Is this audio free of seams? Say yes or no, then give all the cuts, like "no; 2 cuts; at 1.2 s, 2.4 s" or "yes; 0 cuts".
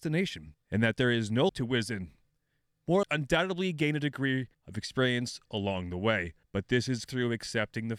no; 5 cuts; at 1.5 s, 3.0 s, 4.5 s, 6.4 s, 7.1 s